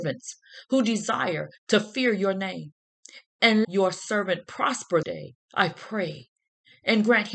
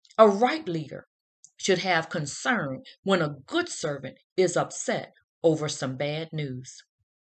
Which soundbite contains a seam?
first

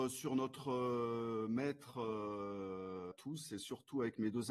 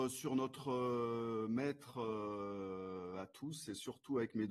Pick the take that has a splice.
first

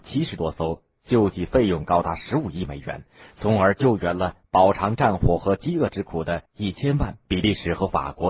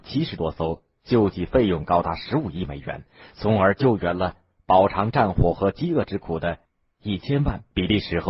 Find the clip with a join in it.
first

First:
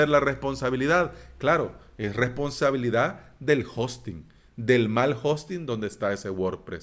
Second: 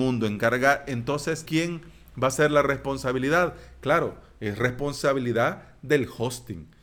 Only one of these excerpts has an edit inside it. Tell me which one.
second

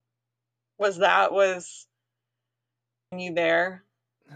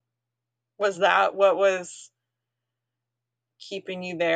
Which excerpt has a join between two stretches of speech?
first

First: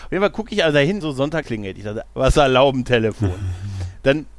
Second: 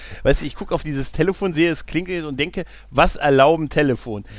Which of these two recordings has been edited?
first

